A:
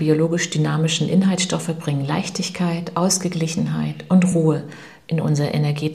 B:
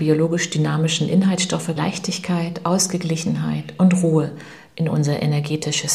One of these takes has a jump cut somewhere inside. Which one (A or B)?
B